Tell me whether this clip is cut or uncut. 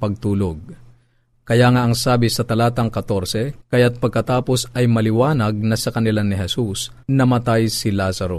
cut